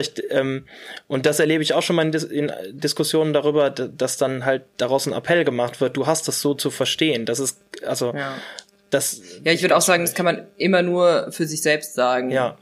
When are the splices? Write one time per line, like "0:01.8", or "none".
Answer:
none